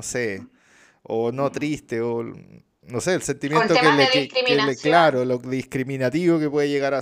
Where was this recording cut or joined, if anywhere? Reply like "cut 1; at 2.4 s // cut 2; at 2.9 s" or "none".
none